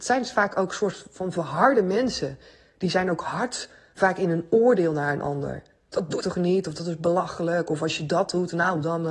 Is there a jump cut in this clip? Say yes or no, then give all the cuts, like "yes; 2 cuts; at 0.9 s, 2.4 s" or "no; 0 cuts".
yes; 1 cut; at 6.2 s